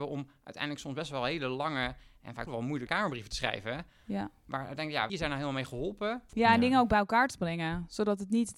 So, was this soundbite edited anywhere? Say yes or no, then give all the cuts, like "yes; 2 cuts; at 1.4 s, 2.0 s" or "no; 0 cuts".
yes; 3 cuts; at 2.5 s, 2.9 s, 5.1 s